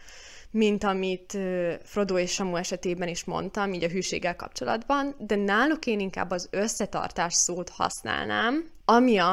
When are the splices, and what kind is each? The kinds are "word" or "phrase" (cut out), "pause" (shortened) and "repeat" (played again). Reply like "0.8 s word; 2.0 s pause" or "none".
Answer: none